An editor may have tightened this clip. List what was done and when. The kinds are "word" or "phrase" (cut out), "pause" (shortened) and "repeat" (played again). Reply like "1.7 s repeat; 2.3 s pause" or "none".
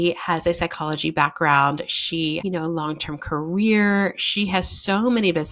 2.4 s word